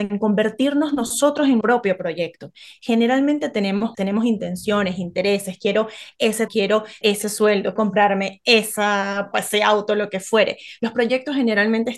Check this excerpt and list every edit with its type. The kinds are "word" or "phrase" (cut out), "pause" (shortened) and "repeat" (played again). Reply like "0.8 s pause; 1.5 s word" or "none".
1.6 s word; 3.9 s word; 6.5 s word; 7.0 s word; 7.8 s word; 9.3 s word

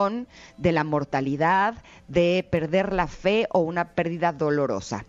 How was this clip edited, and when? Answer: none

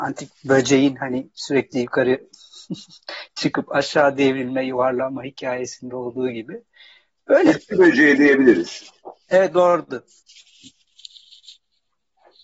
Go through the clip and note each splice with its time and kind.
none

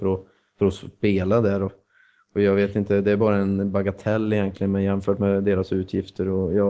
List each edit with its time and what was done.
none

